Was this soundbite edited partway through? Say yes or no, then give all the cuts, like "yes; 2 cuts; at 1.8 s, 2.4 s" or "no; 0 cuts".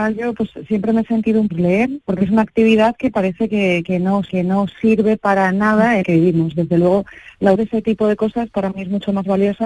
yes; 5 cuts; at 1.5 s, 2.0 s, 4.3 s, 6.0 s, 7.6 s